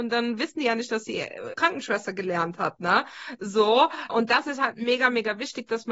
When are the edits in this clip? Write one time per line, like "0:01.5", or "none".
0:01.5
0:04.1